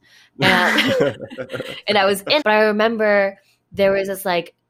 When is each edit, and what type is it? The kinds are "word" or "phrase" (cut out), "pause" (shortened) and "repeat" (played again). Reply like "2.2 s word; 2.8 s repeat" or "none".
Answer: 2.4 s word